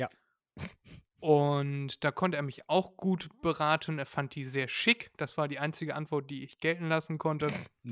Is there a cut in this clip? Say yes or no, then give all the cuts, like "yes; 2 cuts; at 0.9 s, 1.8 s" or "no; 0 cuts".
no; 0 cuts